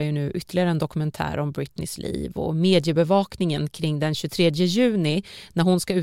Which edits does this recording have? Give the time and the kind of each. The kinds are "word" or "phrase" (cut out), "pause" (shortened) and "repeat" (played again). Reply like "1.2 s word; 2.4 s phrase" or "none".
none